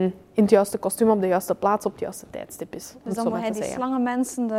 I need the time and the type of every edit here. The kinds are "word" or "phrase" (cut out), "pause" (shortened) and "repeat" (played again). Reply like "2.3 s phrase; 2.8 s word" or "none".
none

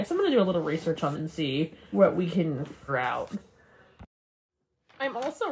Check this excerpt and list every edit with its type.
1.1 s word; 1.9 s word; 2.9 s word

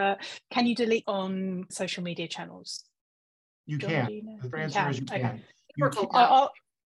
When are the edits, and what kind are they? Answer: 1.0 s word; 1.7 s word; 4.5 s word

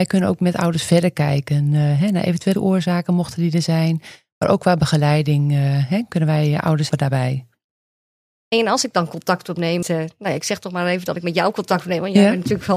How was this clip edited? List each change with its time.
2.5 s word; 6.9 s word; 9.8 s word

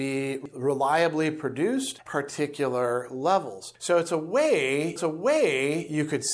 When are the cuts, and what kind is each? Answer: 2.1 s phrase; 5.0 s repeat

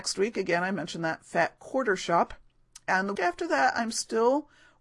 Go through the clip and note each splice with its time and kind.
3.1 s word

